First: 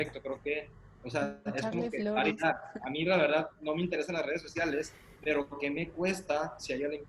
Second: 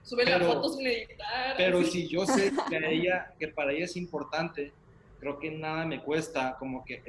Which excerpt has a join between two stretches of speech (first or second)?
first